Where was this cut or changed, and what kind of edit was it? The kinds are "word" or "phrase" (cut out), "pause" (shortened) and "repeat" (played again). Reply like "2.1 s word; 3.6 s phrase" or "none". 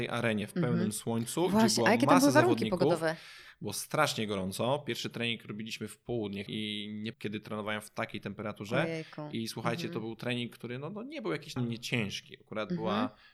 6.5 s word; 7.1 s word; 11.6 s word